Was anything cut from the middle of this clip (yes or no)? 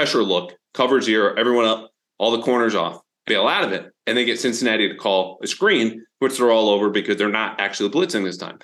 yes